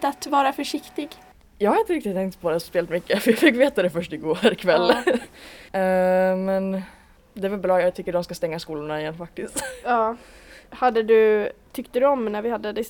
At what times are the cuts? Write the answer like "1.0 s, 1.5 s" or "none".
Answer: none